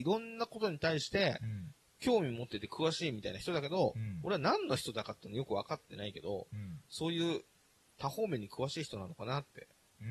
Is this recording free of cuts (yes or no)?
yes